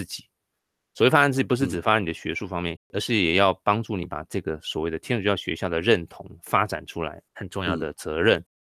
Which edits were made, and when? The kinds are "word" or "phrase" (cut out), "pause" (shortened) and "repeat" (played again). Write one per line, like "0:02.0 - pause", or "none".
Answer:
0:02.8 - word
0:07.3 - pause